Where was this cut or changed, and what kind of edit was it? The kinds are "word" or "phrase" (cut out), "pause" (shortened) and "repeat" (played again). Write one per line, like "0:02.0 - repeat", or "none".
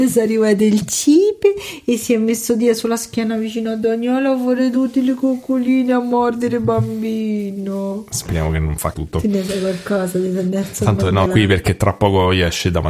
0:08.9 - word
0:11.3 - word